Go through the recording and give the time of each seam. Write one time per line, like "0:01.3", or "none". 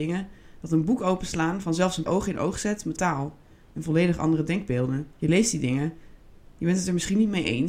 0:02.1
0:03.0
0:05.1